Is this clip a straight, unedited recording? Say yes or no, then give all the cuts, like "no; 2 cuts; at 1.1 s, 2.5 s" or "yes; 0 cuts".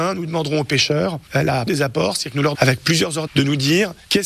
no; 3 cuts; at 1.7 s, 2.5 s, 3.3 s